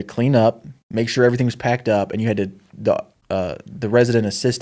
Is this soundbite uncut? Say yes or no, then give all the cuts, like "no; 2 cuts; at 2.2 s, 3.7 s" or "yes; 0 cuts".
yes; 0 cuts